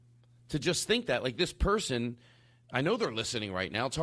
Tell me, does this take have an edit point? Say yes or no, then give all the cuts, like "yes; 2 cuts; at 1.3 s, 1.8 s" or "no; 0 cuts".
no; 0 cuts